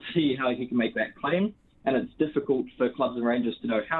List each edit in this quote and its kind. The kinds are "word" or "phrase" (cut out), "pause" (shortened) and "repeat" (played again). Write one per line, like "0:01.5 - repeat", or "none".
none